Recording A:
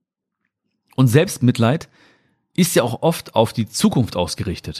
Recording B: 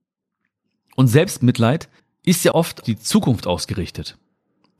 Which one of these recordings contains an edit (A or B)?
B